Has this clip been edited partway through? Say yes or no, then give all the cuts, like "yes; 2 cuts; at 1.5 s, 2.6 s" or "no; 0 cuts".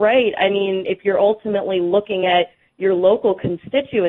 no; 0 cuts